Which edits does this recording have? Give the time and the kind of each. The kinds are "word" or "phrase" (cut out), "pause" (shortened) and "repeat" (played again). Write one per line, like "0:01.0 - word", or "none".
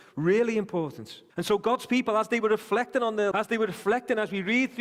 0:01.3 - pause
0:03.3 - word